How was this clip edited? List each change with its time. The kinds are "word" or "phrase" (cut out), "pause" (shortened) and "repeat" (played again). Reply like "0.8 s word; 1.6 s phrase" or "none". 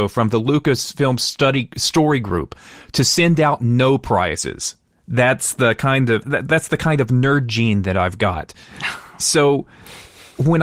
6.2 s word